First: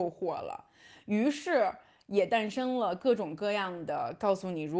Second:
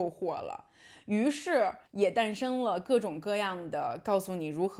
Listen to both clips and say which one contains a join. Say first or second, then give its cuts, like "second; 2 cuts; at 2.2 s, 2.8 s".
second; 1 cut; at 1.9 s